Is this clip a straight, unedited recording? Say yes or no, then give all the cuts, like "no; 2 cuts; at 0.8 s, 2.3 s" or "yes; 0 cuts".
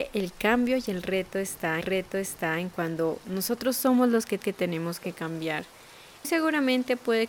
no; 3 cuts; at 1.8 s, 4.4 s, 6.2 s